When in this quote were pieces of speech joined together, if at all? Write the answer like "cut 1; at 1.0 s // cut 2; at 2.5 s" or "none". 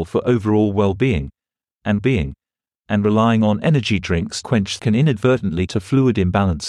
cut 1; at 2.0 s // cut 2; at 4.4 s // cut 3; at 4.8 s // cut 4; at 5.7 s